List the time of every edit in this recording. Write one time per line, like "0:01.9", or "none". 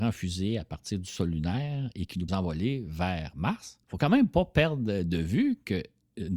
0:02.3
0:03.8